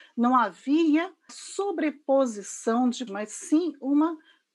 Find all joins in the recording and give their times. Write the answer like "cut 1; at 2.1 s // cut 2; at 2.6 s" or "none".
cut 1; at 1.3 s // cut 2; at 3.1 s

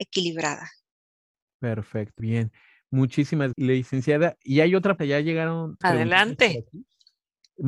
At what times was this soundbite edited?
cut 1; at 2.2 s // cut 2; at 3.5 s // cut 3; at 5.0 s // cut 4; at 5.8 s

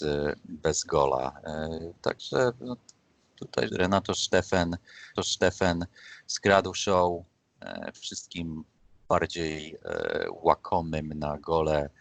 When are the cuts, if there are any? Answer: cut 1; at 3.7 s // cut 2; at 5.2 s // cut 3; at 8.8 s

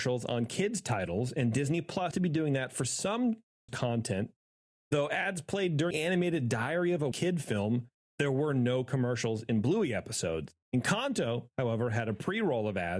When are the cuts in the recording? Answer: cut 1; at 2.1 s // cut 2; at 3.7 s // cut 3; at 5.9 s // cut 4; at 7.1 s

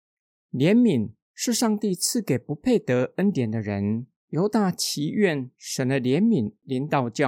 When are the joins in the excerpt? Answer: cut 1; at 4.2 s

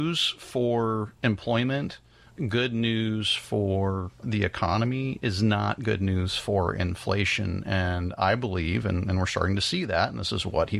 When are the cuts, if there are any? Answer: none

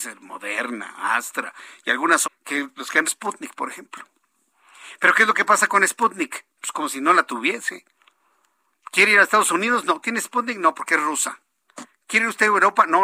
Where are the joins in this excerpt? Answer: cut 1; at 2.2 s // cut 2; at 3.0 s

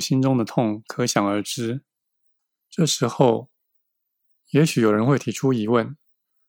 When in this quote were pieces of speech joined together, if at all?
none

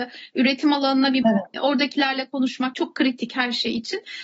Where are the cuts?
cut 1; at 1.2 s // cut 2; at 1.5 s // cut 3; at 2.7 s

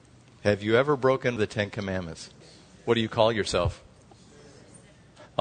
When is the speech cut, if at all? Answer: cut 1; at 1.4 s // cut 2; at 2.4 s

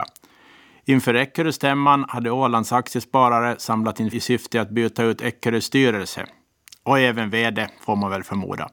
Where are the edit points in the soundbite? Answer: cut 1; at 4.1 s

